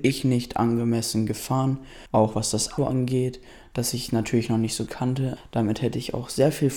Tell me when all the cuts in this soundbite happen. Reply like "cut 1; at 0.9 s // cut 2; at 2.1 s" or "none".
cut 1; at 2.1 s // cut 2; at 2.8 s // cut 3; at 4.9 s // cut 4; at 5.4 s